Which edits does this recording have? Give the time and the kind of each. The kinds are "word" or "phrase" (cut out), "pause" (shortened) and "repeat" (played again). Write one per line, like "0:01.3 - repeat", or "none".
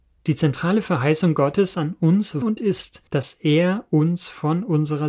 0:02.4 - word
0:03.1 - pause